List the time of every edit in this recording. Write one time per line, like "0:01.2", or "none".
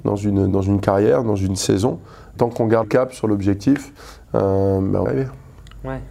0:02.4
0:02.8
0:05.1